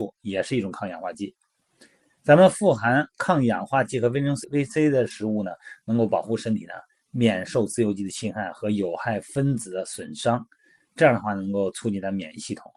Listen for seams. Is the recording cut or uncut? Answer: cut